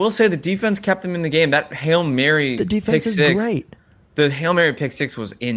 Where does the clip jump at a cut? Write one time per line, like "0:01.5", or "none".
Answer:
none

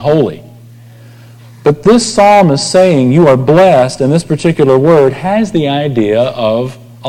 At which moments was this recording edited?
none

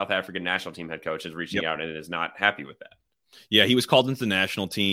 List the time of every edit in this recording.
none

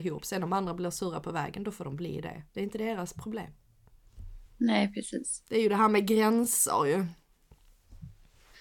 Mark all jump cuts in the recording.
0:02.5
0:04.5

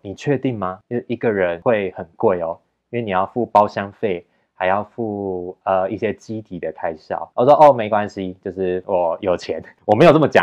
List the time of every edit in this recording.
none

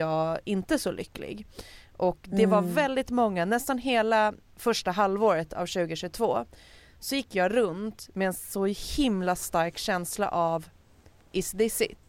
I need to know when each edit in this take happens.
none

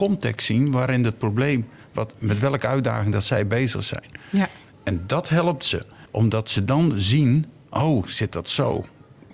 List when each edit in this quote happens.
0:06.1

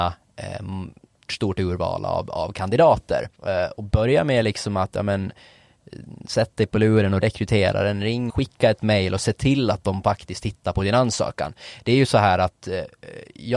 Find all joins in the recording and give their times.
0:01.3
0:03.4
0:07.2
0:08.3

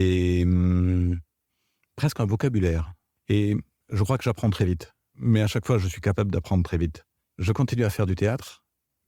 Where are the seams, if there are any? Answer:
none

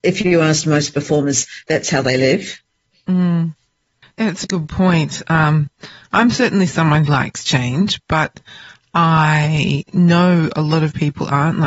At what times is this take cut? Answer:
0:04.4
0:07.1

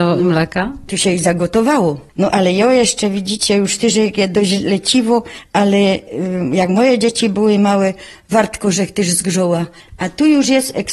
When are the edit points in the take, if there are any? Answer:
none

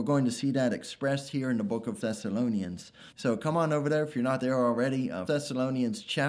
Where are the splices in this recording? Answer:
0:02.0
0:03.1
0:05.3

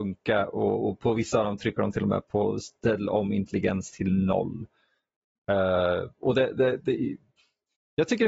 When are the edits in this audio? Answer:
none

